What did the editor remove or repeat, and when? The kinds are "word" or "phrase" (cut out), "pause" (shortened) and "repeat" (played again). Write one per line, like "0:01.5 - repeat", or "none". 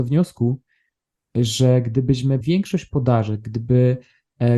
0:02.4 - word